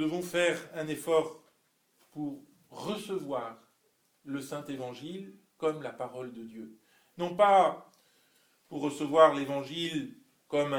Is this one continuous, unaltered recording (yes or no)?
yes